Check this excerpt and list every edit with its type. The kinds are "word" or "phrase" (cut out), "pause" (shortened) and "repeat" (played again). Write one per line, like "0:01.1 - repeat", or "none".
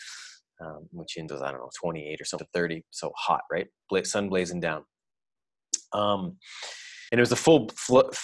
0:01.3 - word
0:02.4 - phrase
0:07.1 - pause